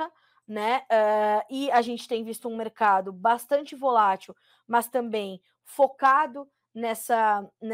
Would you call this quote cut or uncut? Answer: uncut